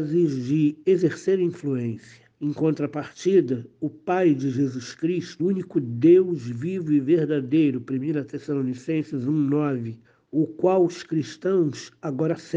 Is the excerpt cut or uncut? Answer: cut